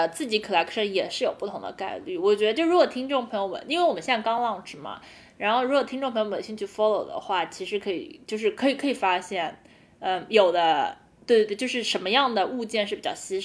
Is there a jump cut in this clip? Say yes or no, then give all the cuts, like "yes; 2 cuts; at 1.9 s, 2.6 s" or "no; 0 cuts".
no; 0 cuts